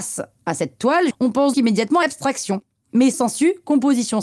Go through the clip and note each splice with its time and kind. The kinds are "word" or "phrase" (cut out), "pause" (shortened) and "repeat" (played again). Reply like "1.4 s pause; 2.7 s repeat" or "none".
1.1 s word; 1.5 s word; 2.0 s word; 3.1 s word